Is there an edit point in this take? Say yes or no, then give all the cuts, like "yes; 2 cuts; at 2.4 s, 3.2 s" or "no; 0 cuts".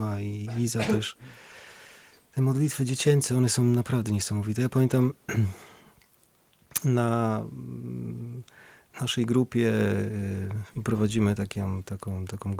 no; 0 cuts